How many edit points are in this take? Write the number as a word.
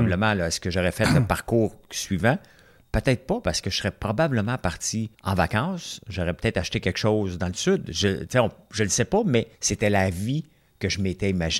two